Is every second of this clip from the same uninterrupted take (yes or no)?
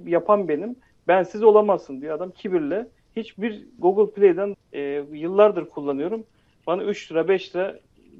no